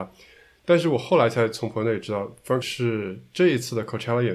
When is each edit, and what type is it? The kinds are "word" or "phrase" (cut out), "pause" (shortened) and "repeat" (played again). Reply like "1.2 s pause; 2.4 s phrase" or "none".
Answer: 2.6 s word